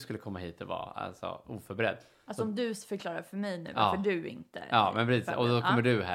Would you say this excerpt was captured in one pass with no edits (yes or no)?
yes